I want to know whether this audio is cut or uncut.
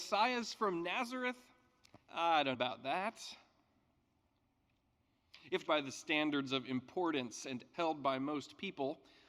cut